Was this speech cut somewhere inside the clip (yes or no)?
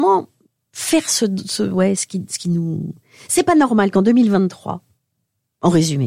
no